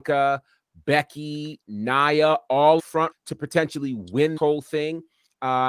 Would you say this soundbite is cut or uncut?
cut